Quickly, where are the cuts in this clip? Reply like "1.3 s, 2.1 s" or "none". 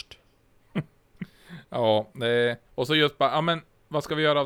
2.7 s